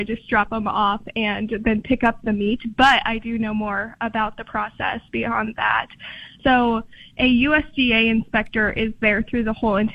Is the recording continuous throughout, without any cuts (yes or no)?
yes